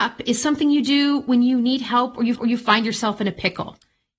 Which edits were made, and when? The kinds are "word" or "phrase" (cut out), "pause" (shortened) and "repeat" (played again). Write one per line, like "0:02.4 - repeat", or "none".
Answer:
0:02.4 - repeat